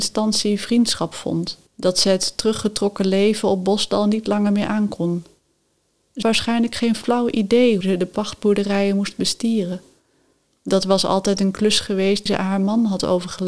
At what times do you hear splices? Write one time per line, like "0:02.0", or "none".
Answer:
0:01.7
0:06.2
0:07.8
0:12.3